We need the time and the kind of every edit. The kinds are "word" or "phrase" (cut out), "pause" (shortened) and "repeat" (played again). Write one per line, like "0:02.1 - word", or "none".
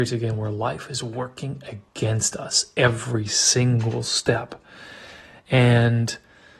none